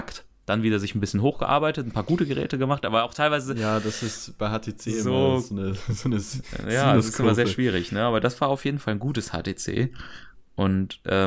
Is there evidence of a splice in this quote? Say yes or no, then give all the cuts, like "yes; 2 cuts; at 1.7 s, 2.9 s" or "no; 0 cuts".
no; 0 cuts